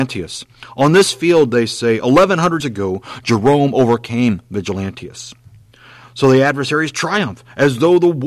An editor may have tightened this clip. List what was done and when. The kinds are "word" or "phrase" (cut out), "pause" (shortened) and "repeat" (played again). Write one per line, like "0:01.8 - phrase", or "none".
0:02.6 - word